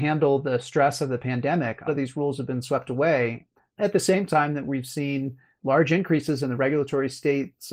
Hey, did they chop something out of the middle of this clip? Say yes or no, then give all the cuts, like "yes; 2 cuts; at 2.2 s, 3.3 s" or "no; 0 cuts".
yes; 1 cut; at 1.9 s